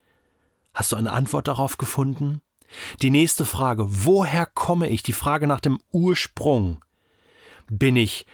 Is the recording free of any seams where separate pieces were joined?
yes; 0 cuts

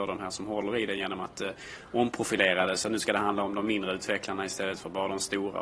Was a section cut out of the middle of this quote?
no; 0 cuts

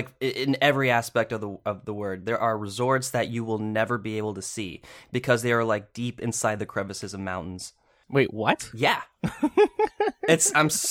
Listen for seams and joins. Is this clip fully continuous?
yes; 0 cuts

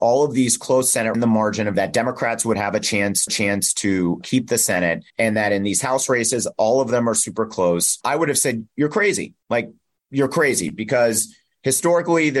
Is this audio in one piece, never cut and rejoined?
no; 5 cuts; at 1.1 s, 2.5 s, 3.3 s, 5.1 s, 9.4 s

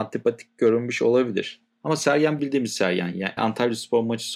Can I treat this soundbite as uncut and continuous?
no; 2 cuts; at 2.4 s, 3.4 s

